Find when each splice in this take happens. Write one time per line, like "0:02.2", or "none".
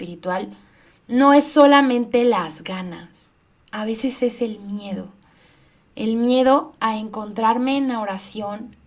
0:03.5

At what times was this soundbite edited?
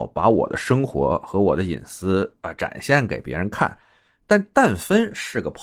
none

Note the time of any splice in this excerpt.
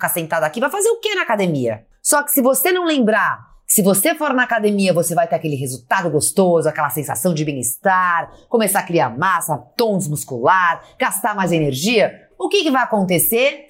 none

